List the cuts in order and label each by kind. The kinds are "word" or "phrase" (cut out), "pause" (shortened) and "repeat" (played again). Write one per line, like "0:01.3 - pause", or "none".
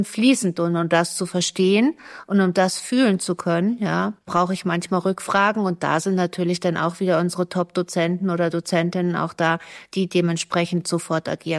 0:04.2 - pause